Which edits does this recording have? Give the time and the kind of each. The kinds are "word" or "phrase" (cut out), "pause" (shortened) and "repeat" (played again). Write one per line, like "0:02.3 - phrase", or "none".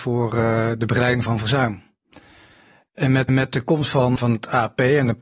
0:03.3 - repeat
0:04.2 - word